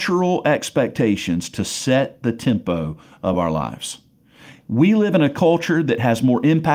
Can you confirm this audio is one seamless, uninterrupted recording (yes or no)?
yes